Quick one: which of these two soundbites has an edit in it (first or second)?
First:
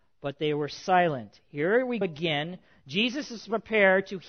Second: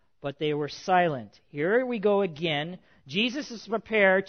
first